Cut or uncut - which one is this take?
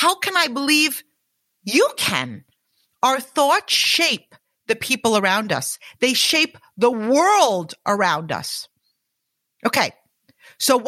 uncut